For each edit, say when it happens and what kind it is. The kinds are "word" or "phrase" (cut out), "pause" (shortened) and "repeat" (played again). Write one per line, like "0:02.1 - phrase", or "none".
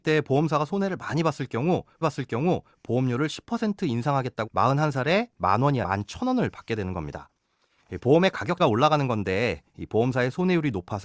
0:02.0 - repeat
0:04.5 - word
0:05.8 - word
0:08.6 - word